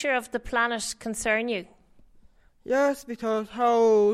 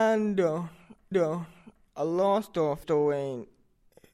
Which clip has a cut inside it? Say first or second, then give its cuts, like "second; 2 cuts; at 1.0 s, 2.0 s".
second; 2 cuts; at 1.1 s, 2.8 s